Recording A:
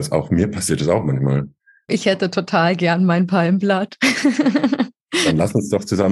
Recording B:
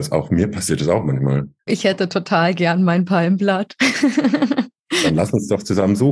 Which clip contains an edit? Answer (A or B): B